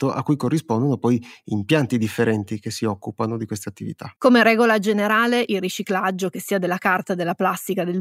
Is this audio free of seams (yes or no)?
no